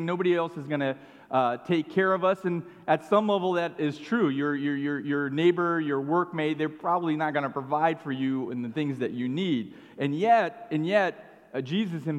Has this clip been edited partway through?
no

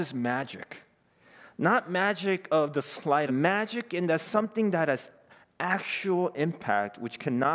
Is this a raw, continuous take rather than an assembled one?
no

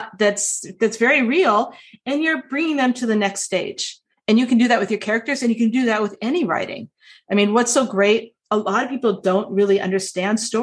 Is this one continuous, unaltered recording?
yes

